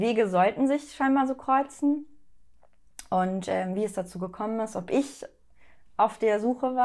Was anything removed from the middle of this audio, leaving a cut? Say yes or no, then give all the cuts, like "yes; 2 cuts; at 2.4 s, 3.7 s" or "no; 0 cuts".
no; 0 cuts